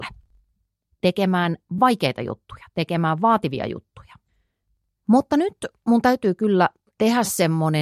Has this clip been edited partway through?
no; 0 cuts

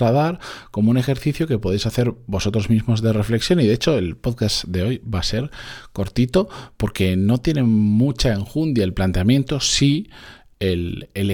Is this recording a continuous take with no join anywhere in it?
yes; 0 cuts

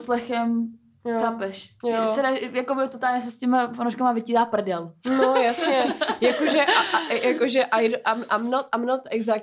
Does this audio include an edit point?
no; 0 cuts

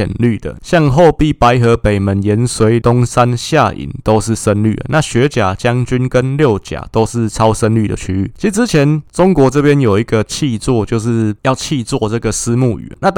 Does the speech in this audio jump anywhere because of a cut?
yes; 1 cut; at 2.8 s

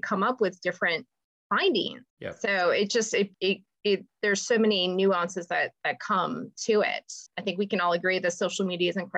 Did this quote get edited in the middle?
yes; 3 cuts; at 2.1 s, 3.3 s, 7.3 s

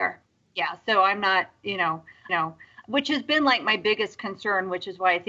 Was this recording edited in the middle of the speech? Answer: yes; 1 cut; at 2.3 s

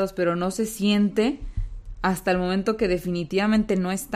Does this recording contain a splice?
no; 0 cuts

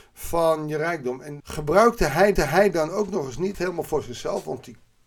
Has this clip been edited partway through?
yes; 3 cuts; at 1.4 s, 2.4 s, 3.5 s

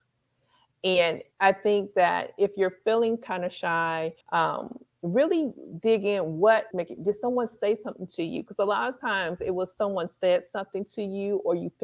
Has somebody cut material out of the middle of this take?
yes; 3 cuts; at 1.3 s, 4.2 s, 6.7 s

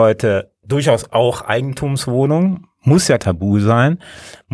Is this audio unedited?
no; 1 cut; at 3.2 s

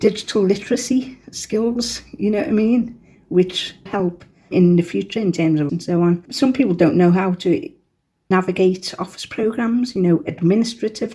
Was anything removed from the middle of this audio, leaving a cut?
yes; 4 cuts; at 3.9 s, 4.5 s, 5.7 s, 8.3 s

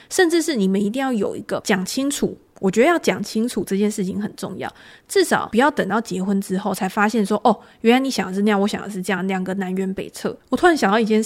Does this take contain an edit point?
no; 0 cuts

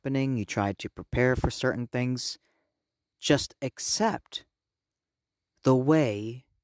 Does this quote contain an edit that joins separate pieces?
no; 0 cuts

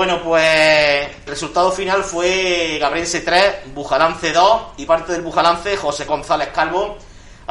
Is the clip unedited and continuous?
no; 3 cuts; at 1.3 s, 4.9 s, 6.1 s

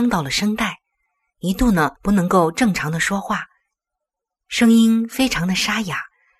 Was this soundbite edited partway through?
yes; 1 cut; at 2.0 s

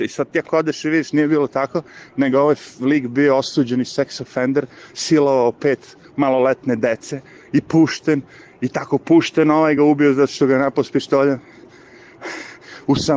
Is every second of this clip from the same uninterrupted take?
yes; 0 cuts

